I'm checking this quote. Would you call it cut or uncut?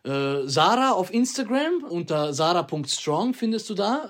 cut